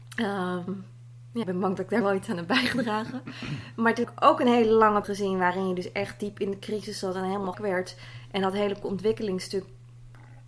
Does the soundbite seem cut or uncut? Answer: cut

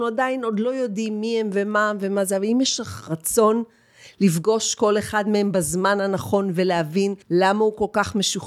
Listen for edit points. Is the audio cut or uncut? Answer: cut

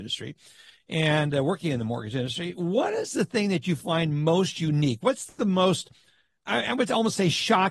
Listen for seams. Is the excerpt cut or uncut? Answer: uncut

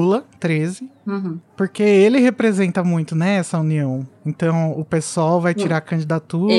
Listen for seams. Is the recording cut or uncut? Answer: uncut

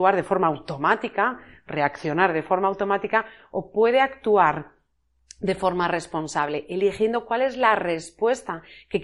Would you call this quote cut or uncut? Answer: uncut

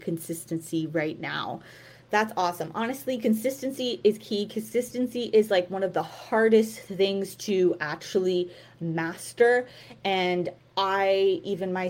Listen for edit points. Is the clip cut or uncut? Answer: uncut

